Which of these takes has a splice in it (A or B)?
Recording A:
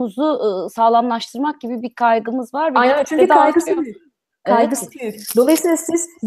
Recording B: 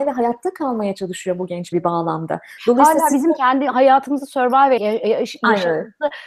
B